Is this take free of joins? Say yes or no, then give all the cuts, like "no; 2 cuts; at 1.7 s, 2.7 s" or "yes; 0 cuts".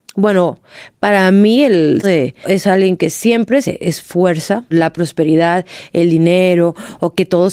no; 4 cuts; at 2.0 s, 2.4 s, 3.6 s, 4.7 s